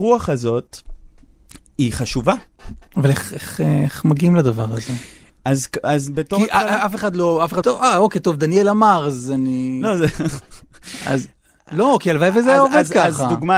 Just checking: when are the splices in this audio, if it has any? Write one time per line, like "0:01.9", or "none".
0:07.6